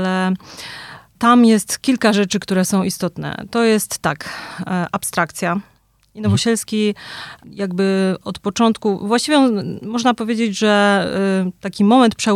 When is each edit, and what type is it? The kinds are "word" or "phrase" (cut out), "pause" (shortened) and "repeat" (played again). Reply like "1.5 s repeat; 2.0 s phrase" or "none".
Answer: none